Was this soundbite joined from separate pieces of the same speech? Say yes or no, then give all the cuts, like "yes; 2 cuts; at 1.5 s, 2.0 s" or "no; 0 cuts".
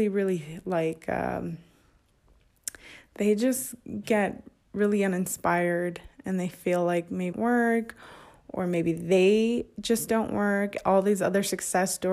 yes; 1 cut; at 7.3 s